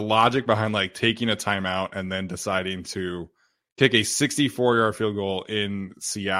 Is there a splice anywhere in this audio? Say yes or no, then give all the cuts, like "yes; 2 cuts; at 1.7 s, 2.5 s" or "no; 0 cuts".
no; 0 cuts